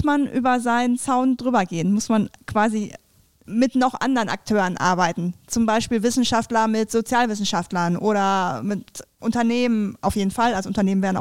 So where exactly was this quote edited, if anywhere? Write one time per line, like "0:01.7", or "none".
none